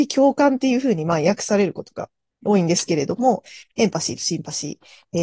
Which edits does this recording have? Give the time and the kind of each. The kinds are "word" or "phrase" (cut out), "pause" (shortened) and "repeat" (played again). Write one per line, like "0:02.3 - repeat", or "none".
none